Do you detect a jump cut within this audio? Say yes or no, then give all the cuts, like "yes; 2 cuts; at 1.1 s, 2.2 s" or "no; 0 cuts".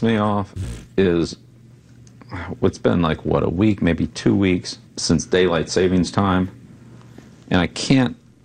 yes; 1 cut; at 4.9 s